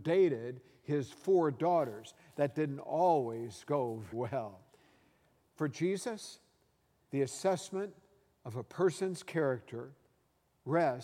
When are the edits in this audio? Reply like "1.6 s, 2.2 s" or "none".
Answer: 4.1 s